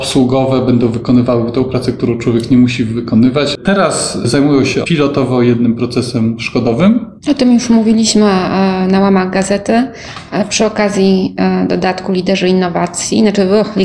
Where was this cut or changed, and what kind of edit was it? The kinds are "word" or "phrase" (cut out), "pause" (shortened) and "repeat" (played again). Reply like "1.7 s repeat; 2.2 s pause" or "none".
4.8 s word; 7.2 s pause